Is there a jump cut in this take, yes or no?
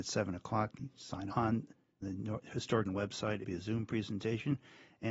yes